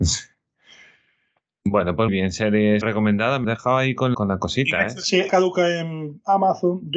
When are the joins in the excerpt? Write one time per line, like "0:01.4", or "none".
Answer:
0:02.1
0:02.8
0:03.4
0:04.1
0:05.3